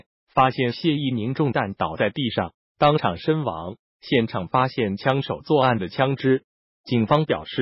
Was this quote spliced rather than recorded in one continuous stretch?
no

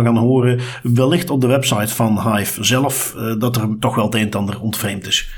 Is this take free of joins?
yes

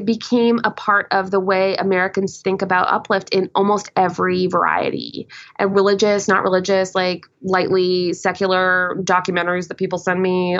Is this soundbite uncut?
no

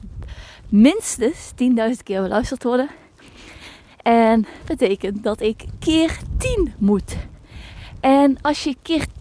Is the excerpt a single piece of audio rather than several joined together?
no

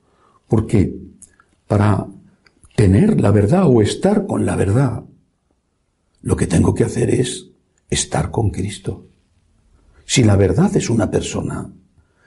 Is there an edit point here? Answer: no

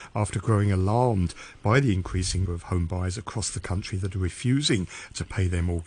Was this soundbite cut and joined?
yes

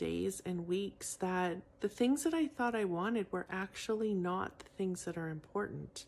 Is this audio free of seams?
no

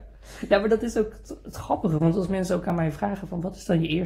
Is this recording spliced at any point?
no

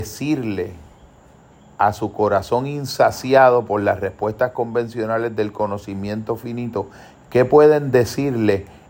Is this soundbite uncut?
yes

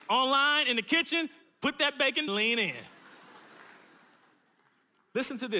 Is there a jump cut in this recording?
yes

